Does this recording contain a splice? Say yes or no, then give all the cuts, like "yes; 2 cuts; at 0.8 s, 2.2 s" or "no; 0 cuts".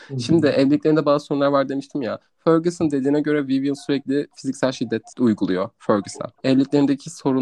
yes; 2 cuts; at 5.1 s, 6.4 s